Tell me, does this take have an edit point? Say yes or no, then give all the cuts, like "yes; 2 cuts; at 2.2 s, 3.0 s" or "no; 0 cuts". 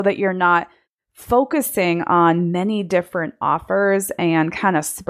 no; 0 cuts